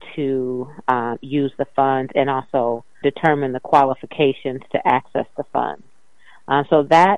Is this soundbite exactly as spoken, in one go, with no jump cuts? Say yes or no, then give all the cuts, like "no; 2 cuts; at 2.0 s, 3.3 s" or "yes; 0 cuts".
no; 1 cut; at 3.0 s